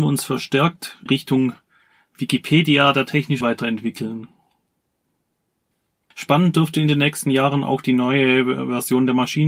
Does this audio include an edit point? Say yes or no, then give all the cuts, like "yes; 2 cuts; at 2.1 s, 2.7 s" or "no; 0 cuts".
yes; 2 cuts; at 1.1 s, 3.4 s